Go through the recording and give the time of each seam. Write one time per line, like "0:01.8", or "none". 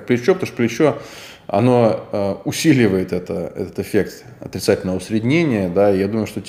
none

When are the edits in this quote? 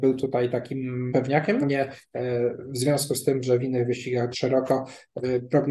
0:01.1
0:01.6
0:04.3

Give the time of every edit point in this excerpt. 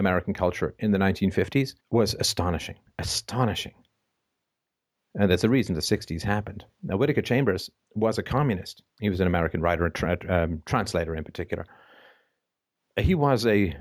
0:01.8
0:08.9

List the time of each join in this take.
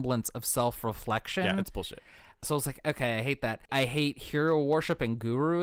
0:03.7

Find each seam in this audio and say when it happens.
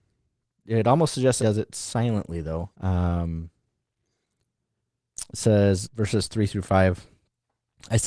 0:01.4
0:02.7
0:05.8

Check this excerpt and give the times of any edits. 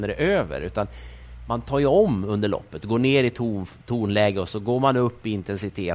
none

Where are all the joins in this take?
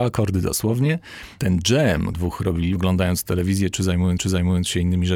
0:02.1
0:02.8
0:04.2

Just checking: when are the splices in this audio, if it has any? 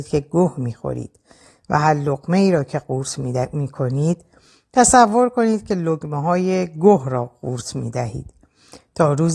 none

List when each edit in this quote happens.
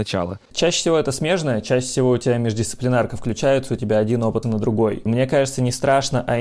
0:04.4

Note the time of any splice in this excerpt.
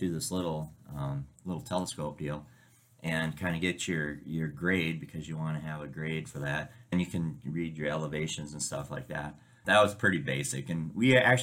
0:06.9
0:09.6

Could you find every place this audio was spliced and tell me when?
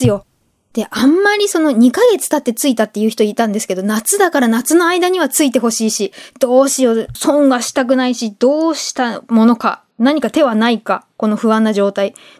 0:07.1
0:09.9

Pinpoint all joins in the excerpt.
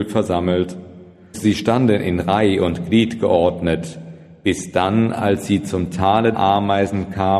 0:01.3
0:06.3

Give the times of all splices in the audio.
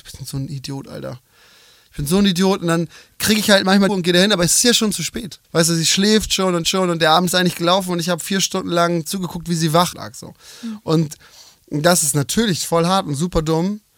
0:03.9
0:05.4
0:06.6
0:09.9

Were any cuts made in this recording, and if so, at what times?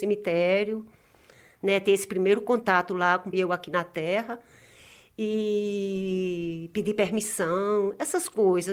0:03.3

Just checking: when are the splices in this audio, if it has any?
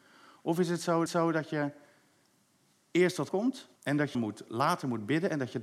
0:01.1
0:03.3
0:03.8
0:04.1

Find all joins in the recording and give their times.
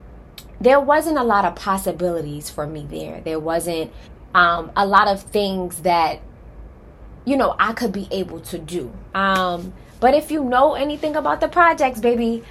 0:04.0
0:09.1

